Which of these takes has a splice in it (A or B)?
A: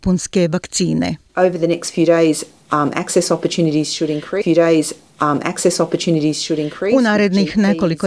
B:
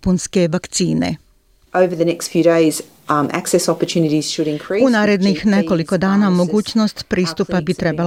A